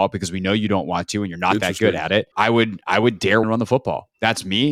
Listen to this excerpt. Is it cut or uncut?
cut